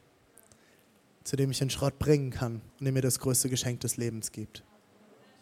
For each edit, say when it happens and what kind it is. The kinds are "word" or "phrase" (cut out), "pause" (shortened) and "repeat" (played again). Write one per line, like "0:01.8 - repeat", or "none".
0:02.7 - pause